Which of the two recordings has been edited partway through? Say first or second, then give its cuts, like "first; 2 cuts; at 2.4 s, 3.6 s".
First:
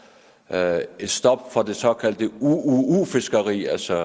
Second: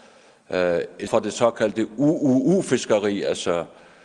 second; 1 cut; at 1.1 s